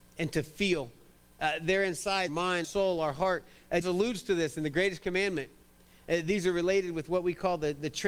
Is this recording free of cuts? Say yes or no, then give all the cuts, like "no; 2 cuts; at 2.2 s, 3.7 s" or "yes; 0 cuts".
no; 3 cuts; at 2.3 s, 2.6 s, 3.8 s